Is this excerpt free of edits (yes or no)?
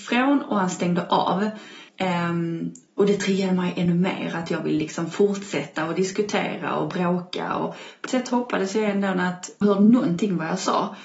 no